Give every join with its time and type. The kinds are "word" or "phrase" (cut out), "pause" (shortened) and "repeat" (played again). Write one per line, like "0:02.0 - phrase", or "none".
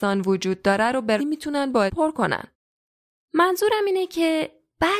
0:01.2 - word
0:01.9 - word